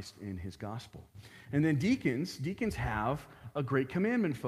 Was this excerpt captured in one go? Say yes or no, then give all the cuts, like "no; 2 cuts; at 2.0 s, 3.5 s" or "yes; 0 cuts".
yes; 0 cuts